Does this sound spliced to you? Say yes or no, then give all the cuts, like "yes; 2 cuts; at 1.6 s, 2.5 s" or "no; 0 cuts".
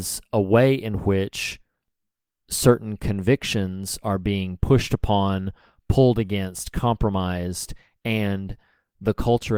no; 0 cuts